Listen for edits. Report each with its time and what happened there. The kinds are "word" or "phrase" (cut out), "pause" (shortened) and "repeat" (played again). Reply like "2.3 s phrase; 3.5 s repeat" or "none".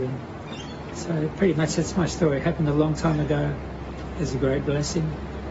none